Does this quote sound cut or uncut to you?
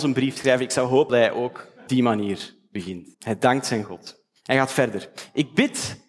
cut